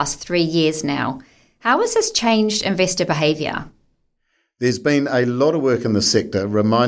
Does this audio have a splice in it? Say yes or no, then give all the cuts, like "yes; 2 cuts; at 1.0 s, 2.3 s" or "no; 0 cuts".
no; 0 cuts